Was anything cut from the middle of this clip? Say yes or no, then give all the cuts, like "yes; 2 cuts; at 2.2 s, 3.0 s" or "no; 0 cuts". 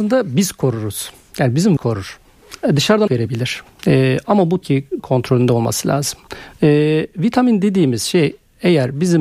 yes; 4 cuts; at 1.8 s, 3.1 s, 4.6 s, 5.0 s